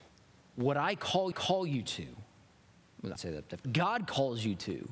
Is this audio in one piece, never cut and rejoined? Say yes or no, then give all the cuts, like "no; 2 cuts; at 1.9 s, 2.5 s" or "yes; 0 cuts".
no; 3 cuts; at 1.3 s, 3.2 s, 3.6 s